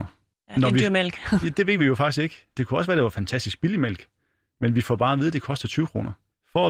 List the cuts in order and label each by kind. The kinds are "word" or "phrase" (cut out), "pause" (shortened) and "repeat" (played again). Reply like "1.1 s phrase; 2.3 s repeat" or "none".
none